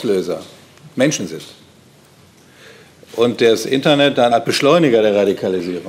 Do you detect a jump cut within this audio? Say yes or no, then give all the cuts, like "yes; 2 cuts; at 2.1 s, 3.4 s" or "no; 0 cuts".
yes; 1 cut; at 4.3 s